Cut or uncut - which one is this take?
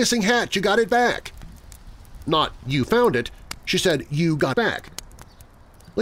cut